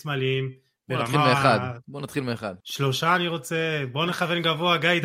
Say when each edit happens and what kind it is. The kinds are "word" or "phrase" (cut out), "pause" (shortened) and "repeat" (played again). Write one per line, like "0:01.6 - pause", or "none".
0:02.6 - pause